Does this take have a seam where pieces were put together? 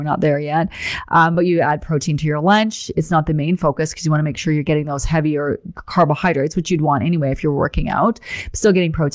no; 0 cuts

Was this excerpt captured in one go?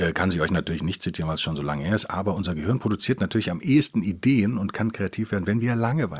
yes; 0 cuts

